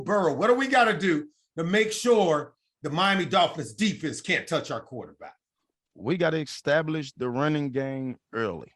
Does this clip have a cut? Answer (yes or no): no